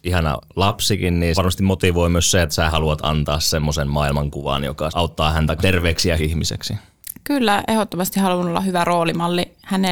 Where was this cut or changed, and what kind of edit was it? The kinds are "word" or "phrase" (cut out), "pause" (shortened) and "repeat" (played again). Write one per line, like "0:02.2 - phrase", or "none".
0:01.3 - word
0:02.7 - word
0:05.6 - word
0:06.2 - word